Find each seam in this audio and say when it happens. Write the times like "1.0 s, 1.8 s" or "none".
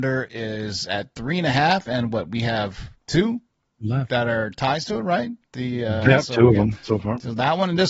none